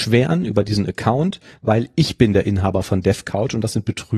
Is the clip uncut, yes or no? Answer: yes